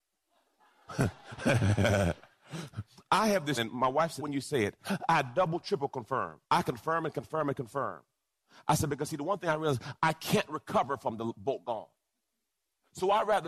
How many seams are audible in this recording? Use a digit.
3